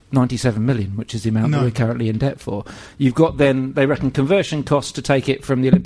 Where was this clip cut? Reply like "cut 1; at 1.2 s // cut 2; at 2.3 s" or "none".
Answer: none